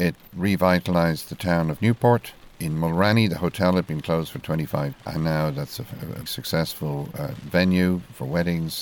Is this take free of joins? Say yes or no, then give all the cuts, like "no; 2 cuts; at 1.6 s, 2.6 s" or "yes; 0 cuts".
no; 2 cuts; at 4.9 s, 6.3 s